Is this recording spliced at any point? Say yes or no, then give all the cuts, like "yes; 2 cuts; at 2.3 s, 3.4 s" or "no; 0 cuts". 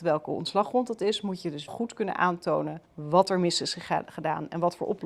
yes; 2 cuts; at 1.7 s, 2.9 s